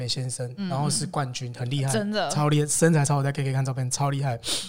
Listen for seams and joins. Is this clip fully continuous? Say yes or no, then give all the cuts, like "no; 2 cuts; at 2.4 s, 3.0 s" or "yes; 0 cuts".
yes; 0 cuts